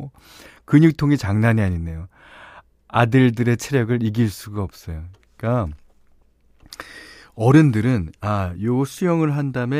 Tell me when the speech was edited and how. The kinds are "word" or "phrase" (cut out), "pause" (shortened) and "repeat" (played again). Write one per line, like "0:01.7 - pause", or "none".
none